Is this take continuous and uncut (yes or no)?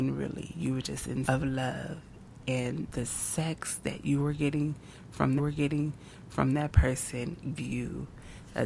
no